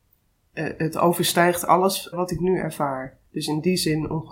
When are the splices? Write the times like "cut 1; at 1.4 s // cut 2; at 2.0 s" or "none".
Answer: cut 1; at 2.1 s // cut 2; at 3.3 s